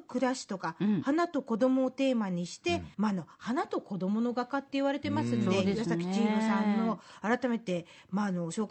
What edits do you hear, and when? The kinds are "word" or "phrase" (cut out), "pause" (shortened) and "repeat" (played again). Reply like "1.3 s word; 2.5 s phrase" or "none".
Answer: 2.9 s pause